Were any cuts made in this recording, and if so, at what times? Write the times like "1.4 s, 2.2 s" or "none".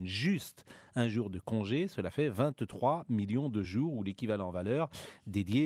none